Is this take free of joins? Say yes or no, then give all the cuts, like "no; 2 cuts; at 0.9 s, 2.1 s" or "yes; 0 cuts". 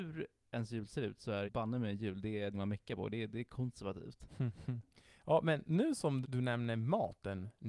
no; 3 cuts; at 1.5 s, 2.5 s, 6.2 s